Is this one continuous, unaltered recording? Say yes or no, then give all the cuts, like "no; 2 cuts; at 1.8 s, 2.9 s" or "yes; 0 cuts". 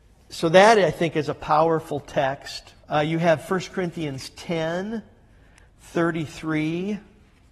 no; 1 cut; at 2.8 s